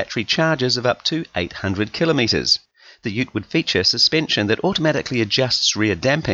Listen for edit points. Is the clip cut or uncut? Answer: uncut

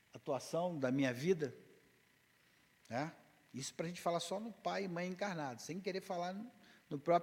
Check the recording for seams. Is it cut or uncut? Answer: uncut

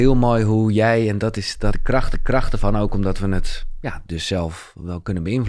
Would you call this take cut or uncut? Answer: cut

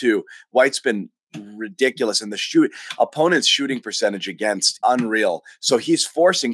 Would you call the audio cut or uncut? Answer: cut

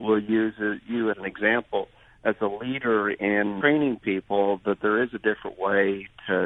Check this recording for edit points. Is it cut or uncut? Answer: cut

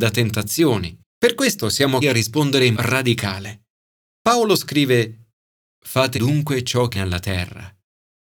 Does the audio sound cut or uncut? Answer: cut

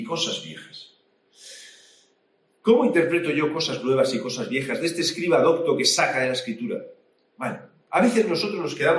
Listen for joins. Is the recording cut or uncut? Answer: uncut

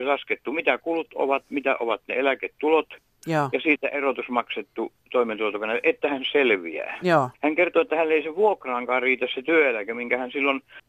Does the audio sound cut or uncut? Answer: cut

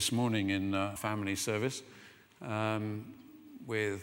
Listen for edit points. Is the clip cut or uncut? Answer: cut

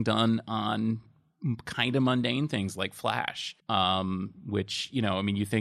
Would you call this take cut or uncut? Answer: cut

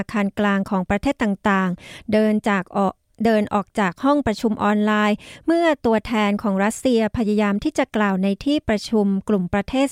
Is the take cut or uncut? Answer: uncut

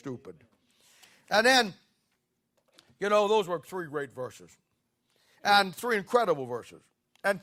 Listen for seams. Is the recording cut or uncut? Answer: uncut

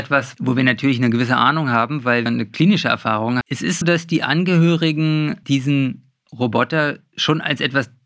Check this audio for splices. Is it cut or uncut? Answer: cut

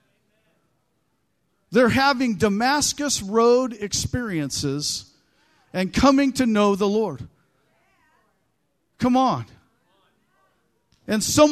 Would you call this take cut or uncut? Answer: uncut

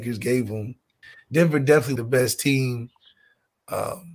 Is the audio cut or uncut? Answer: cut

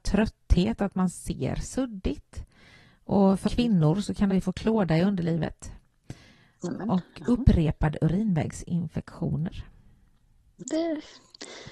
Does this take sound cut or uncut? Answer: cut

